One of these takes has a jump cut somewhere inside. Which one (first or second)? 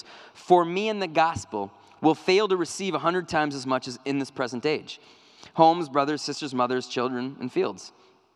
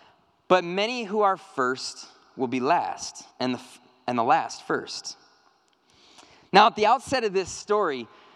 second